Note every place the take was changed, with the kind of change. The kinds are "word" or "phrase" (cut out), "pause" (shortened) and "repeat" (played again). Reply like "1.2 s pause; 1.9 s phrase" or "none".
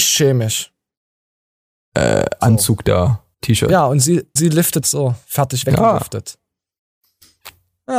3.3 s pause; 4.4 s word; 4.8 s word